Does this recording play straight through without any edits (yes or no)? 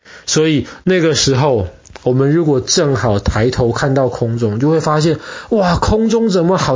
yes